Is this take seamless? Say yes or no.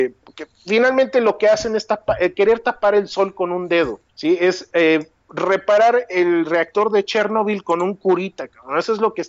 no